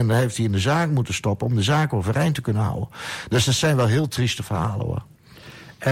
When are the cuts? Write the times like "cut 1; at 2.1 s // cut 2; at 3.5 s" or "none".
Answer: none